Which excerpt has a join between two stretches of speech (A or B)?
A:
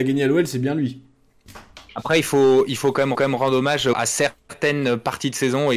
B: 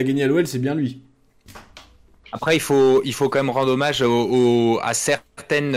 A